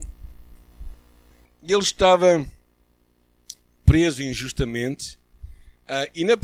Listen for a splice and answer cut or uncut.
uncut